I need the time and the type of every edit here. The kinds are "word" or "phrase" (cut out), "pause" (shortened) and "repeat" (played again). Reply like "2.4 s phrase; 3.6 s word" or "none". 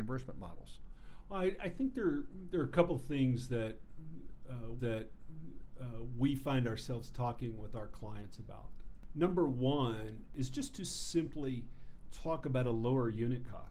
4.8 s repeat